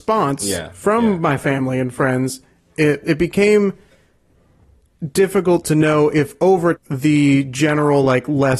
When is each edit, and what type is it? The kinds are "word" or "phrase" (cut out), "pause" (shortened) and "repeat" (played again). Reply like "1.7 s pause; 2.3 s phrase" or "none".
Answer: 3.0 s word; 6.7 s word